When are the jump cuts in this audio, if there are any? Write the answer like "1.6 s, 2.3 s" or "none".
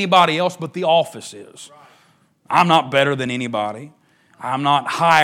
none